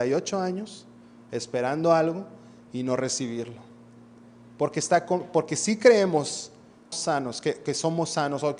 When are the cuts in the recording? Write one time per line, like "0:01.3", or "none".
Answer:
0:06.9